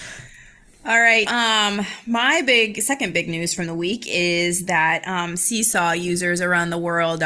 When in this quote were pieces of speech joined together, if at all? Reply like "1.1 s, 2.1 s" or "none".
1.3 s